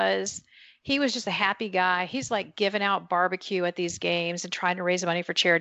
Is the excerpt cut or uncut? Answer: uncut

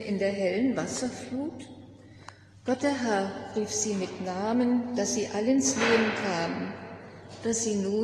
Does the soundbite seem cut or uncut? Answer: uncut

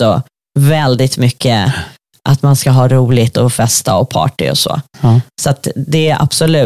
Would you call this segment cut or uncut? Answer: uncut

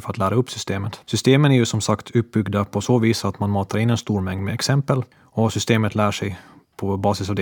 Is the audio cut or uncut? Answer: cut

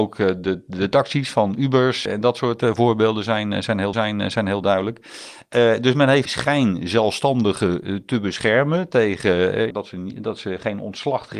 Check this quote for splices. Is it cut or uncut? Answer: cut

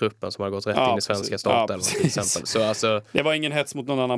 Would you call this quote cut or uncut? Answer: uncut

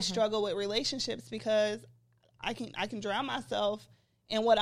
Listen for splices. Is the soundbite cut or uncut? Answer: uncut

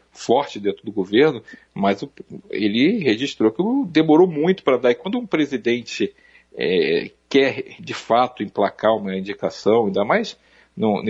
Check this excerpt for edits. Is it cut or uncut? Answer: uncut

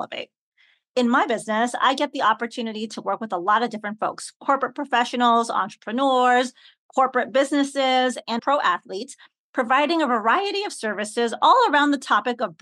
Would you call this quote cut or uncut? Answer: cut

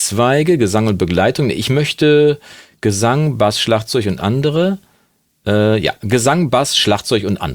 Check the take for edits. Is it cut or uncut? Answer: uncut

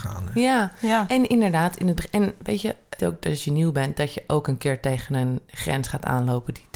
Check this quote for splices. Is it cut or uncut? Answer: cut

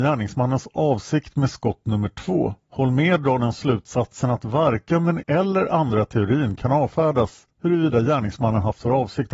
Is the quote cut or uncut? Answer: cut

